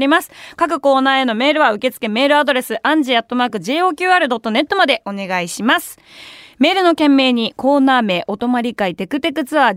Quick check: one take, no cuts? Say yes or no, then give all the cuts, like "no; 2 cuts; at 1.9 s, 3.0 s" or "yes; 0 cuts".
yes; 0 cuts